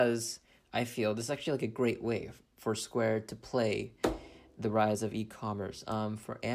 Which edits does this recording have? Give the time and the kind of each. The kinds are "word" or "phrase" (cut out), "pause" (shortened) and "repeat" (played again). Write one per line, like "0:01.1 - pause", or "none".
none